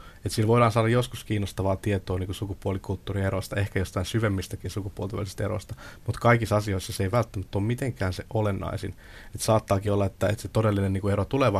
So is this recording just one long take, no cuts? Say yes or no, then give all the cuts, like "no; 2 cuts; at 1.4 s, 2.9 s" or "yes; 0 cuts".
yes; 0 cuts